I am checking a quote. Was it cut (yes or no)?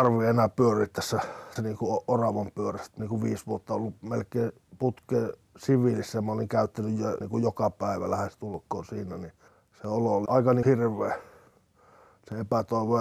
yes